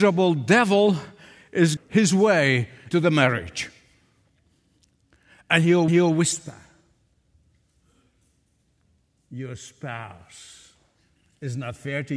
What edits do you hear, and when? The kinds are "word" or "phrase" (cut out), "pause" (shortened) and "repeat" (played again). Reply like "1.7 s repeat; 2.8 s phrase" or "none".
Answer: 1.8 s phrase; 2.9 s word; 5.9 s repeat